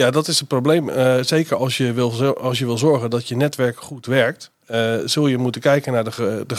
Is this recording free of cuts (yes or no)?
yes